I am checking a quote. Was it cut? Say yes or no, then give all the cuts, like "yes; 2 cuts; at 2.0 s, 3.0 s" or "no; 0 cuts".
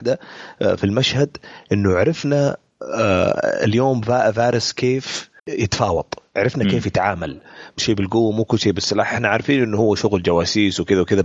yes; 2 cuts; at 5.4 s, 7.8 s